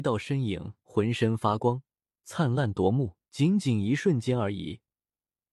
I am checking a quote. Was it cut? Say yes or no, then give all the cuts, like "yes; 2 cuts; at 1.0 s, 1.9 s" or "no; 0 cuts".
yes; 1 cut; at 3.2 s